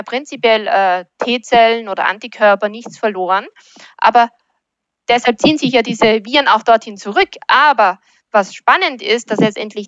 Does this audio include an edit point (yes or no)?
no